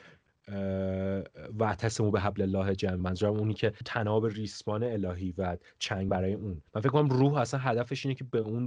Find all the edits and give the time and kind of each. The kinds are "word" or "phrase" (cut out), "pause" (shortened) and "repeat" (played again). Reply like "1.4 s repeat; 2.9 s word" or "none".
3.0 s word; 3.8 s word; 6.1 s word; 6.7 s pause